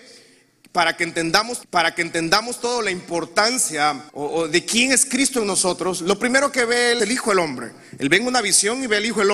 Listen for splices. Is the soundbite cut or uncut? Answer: cut